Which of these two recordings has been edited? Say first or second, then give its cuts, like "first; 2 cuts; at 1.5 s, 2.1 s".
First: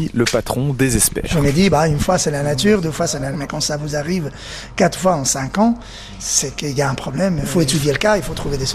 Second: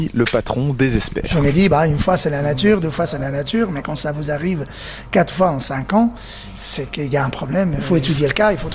first; 1 cut; at 3.3 s